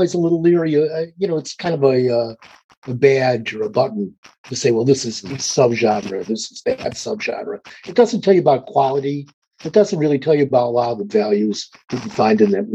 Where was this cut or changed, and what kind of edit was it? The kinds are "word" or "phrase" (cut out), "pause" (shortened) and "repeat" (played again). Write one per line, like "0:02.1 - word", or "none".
none